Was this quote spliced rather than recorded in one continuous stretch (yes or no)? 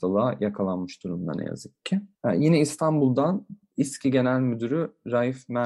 yes